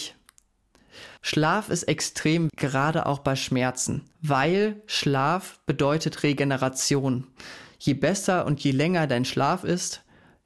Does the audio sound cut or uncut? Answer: cut